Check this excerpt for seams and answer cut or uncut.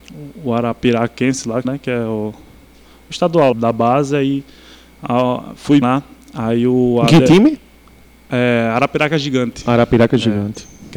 cut